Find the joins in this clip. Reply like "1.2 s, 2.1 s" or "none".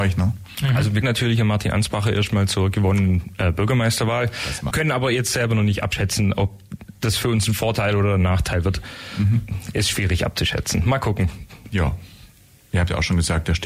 1.0 s, 4.7 s